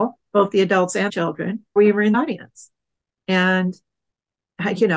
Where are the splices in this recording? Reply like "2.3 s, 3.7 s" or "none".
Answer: 1.1 s, 1.8 s, 2.1 s